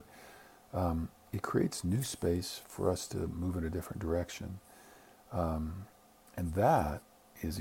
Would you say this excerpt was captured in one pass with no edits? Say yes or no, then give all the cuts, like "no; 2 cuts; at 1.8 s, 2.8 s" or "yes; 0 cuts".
yes; 0 cuts